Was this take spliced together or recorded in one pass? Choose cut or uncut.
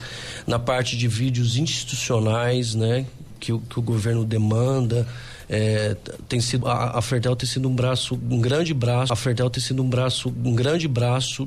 cut